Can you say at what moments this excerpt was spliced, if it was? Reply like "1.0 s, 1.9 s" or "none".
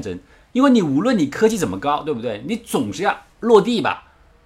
3.3 s

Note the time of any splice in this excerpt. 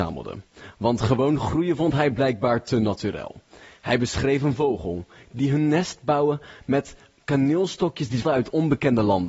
8.2 s

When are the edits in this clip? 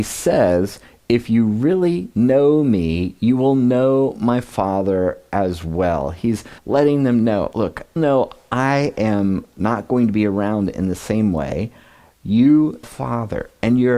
6.6 s, 8.0 s, 12.8 s

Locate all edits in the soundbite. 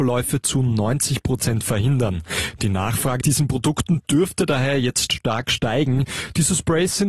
3.2 s

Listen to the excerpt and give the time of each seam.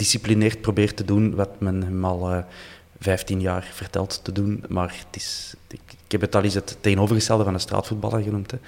none

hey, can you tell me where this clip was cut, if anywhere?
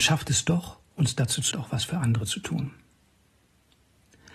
1.5 s

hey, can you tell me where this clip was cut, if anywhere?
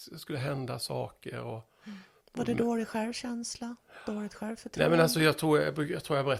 none

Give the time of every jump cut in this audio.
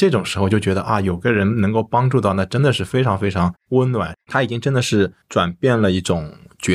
4.2 s, 5.2 s

